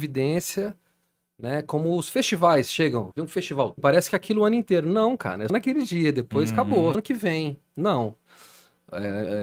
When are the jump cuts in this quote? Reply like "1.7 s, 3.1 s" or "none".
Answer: 3.1 s, 3.8 s, 5.5 s, 6.9 s